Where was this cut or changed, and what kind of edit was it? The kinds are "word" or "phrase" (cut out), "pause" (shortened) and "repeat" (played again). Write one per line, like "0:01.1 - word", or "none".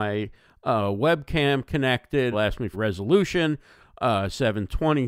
0:02.3 - word
0:02.7 - word